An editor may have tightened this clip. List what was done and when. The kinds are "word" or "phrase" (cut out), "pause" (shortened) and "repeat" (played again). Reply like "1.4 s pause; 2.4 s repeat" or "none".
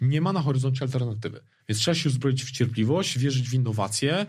none